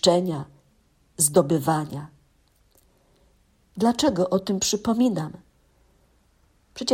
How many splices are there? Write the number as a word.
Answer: zero